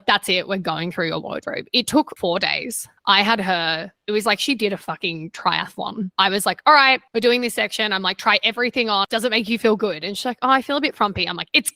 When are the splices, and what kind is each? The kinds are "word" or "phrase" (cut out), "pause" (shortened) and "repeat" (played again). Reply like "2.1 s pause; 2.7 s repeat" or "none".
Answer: none